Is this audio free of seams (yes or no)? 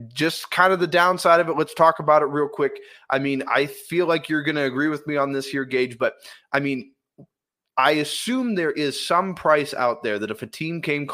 yes